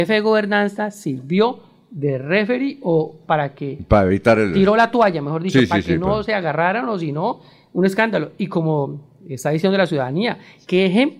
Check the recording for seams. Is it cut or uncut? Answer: uncut